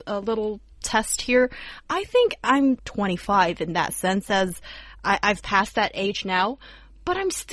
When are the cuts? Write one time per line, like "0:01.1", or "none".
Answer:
0:02.8